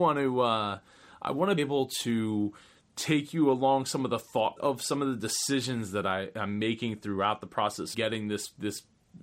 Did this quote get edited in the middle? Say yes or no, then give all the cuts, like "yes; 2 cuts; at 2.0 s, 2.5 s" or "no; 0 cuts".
yes; 3 cuts; at 1.6 s, 4.6 s, 7.9 s